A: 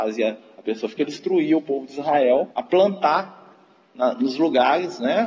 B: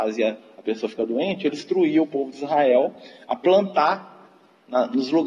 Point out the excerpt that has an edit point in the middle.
A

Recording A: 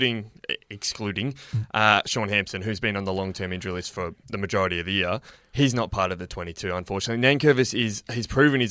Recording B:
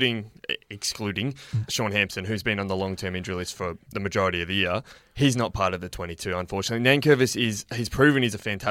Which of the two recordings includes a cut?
B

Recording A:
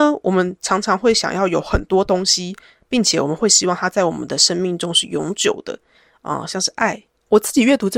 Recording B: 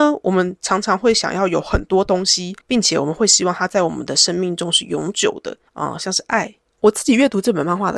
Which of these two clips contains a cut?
B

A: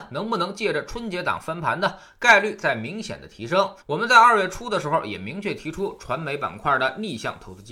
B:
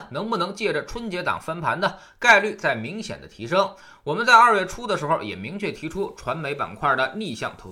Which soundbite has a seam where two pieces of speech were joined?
A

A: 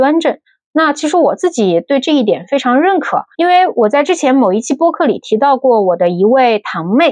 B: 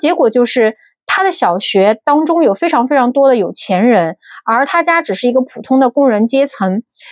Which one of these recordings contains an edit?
A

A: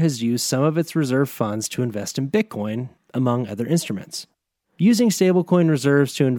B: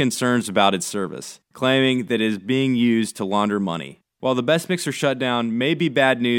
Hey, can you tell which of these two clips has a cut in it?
B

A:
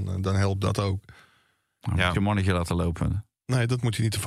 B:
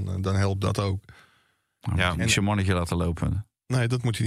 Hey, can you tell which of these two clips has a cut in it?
A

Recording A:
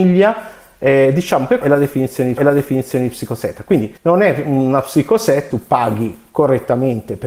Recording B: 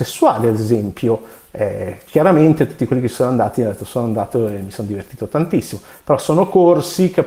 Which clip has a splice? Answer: A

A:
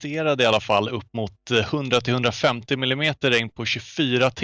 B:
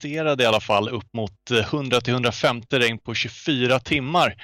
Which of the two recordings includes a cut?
B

